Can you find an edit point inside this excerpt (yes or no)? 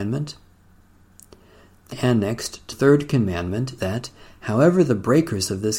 yes